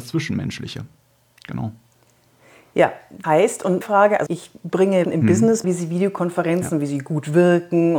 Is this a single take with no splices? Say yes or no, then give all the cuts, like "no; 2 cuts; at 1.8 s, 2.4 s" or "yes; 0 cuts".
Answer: no; 5 cuts; at 3.2 s, 3.8 s, 4.3 s, 5.0 s, 5.6 s